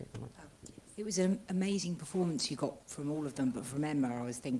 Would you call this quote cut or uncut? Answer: uncut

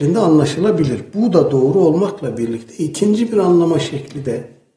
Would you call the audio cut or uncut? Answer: uncut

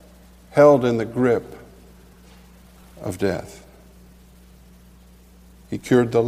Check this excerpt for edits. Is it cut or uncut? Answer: uncut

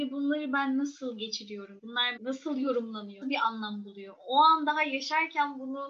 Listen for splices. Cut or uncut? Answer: cut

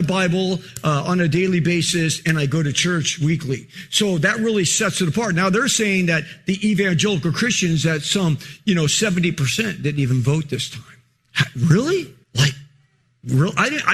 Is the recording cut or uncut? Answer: cut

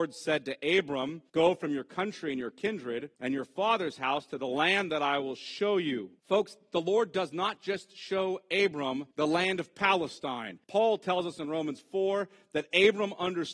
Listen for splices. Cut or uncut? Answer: cut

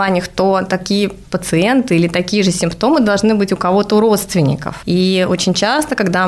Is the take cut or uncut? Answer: uncut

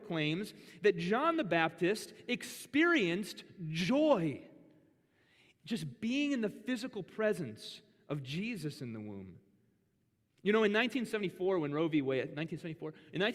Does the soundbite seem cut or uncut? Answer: uncut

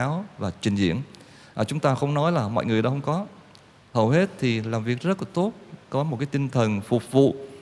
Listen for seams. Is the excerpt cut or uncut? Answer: uncut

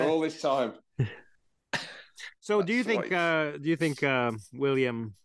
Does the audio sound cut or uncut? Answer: uncut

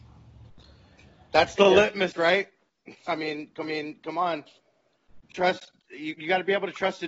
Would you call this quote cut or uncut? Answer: cut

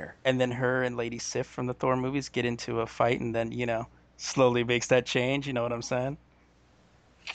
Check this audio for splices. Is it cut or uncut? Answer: uncut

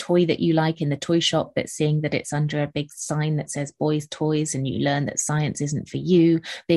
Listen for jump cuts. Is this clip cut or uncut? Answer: uncut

